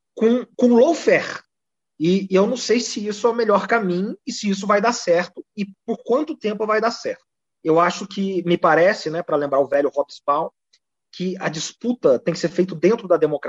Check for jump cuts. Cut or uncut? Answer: uncut